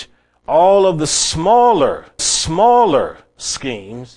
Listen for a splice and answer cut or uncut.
cut